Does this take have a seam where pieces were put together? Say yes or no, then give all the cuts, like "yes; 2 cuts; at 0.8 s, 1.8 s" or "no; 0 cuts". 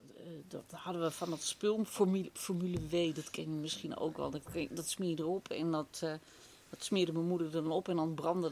no; 0 cuts